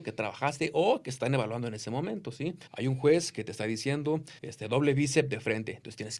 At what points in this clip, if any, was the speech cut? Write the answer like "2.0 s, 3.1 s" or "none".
2.7 s, 4.4 s